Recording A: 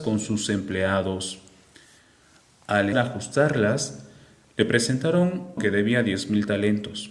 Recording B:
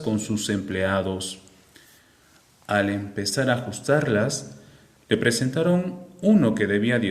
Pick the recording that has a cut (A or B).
A